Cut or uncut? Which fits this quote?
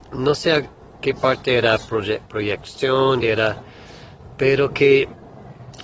cut